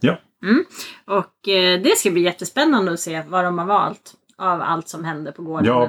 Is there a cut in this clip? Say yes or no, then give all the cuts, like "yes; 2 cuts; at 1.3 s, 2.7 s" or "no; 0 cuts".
no; 0 cuts